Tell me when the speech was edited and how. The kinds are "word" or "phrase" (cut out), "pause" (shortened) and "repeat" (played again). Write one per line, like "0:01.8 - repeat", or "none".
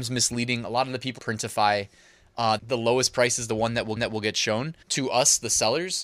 0:01.2 - word
0:02.6 - phrase
0:04.0 - repeat
0:04.8 - pause